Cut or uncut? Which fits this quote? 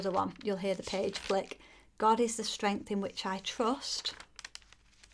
uncut